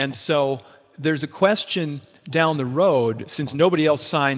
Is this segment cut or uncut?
uncut